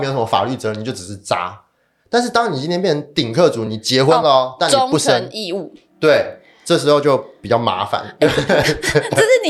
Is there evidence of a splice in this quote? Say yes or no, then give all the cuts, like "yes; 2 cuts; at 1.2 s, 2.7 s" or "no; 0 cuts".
no; 0 cuts